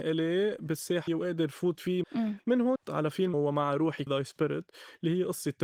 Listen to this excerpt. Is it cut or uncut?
cut